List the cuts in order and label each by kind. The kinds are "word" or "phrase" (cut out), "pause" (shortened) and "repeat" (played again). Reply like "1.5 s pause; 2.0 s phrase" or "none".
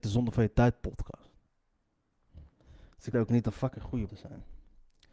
3.1 s word; 4.1 s word